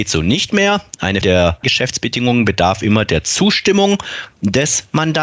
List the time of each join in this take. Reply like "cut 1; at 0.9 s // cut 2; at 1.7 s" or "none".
cut 1; at 1.2 s // cut 2; at 1.6 s